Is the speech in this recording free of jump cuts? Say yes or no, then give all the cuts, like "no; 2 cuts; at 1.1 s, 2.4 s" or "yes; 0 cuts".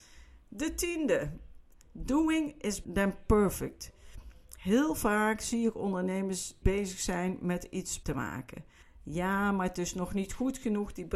no; 3 cuts; at 2.8 s, 6.6 s, 8.0 s